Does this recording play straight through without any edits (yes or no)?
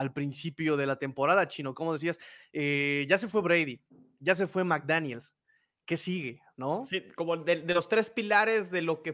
yes